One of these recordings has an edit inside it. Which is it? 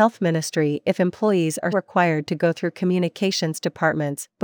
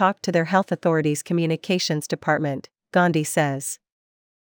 first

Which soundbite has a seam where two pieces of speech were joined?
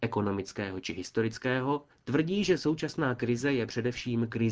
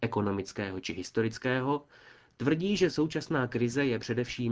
first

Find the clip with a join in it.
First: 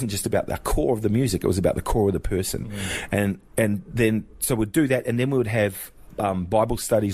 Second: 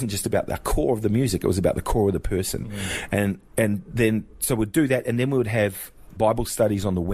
second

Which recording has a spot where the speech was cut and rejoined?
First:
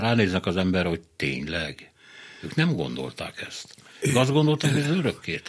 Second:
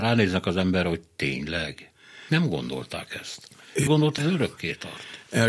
second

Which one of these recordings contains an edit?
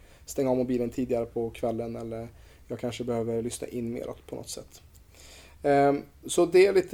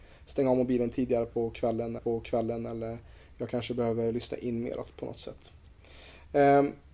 second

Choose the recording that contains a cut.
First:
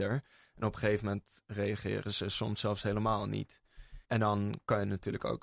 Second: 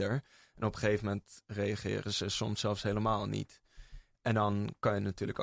first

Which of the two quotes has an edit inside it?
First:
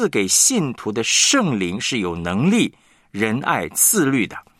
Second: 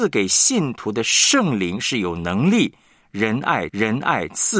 second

